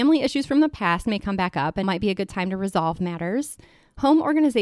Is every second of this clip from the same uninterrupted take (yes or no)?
no